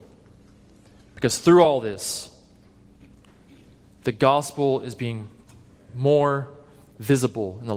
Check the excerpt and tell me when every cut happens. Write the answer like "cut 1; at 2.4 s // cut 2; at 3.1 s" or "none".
none